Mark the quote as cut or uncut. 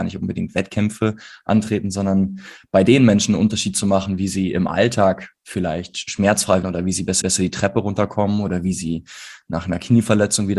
cut